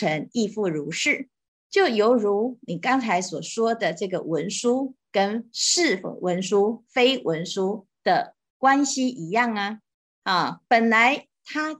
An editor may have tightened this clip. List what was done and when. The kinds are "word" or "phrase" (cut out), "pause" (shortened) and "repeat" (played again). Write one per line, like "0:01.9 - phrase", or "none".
none